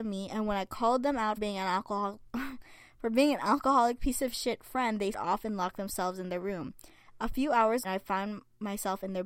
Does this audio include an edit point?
yes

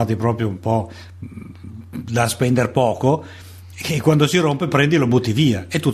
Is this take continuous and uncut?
yes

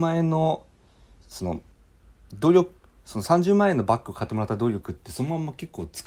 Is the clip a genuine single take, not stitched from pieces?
no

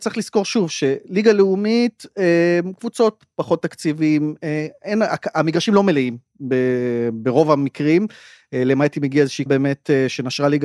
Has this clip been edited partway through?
yes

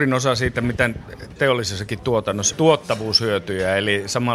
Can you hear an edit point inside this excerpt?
yes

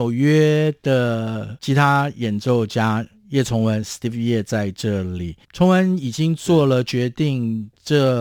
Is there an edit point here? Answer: yes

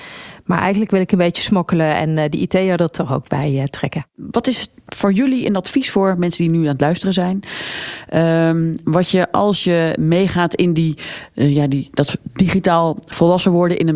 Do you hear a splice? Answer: no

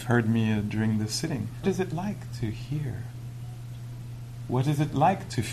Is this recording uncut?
no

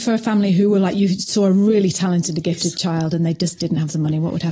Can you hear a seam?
no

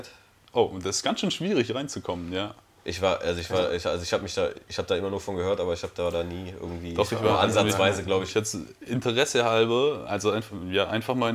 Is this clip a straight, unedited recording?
yes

